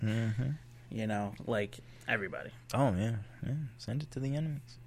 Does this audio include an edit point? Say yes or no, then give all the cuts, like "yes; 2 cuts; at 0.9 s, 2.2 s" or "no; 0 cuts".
yes; 1 cut; at 1.4 s